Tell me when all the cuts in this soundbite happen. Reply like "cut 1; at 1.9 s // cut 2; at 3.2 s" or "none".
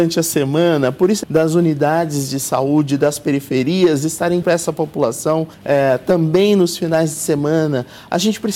cut 1; at 1.2 s // cut 2; at 4.4 s // cut 3; at 5.5 s

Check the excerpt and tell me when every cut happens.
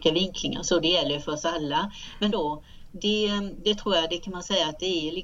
cut 1; at 2.3 s

